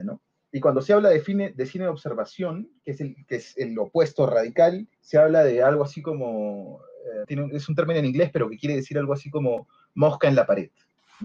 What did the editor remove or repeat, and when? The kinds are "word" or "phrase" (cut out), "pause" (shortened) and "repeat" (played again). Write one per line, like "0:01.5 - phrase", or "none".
0:04.9 - pause
0:07.2 - word